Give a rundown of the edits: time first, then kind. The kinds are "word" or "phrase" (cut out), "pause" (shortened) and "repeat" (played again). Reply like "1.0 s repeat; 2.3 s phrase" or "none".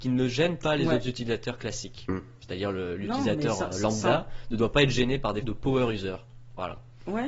5.4 s word